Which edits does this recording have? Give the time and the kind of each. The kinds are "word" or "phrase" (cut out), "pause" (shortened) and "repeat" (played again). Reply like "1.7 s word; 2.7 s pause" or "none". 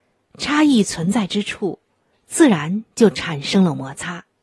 none